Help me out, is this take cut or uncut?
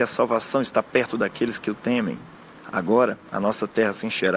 uncut